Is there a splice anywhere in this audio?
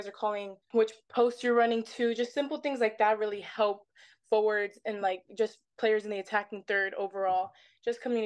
no; 0 cuts

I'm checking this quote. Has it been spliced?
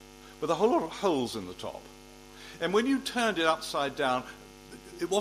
no; 0 cuts

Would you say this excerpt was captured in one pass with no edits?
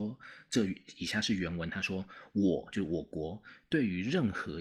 yes; 0 cuts

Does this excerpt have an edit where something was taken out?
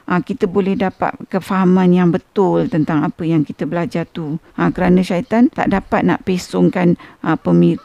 yes; 2 cuts; at 4.5 s, 5.5 s

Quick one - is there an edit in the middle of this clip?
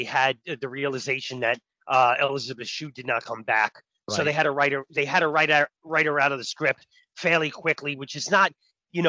no; 0 cuts

